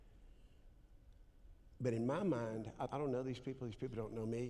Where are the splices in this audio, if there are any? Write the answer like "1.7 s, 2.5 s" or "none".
2.9 s